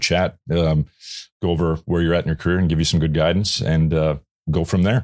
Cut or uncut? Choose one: uncut